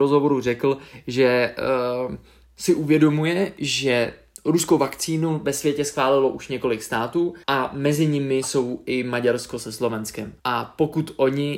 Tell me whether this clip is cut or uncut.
cut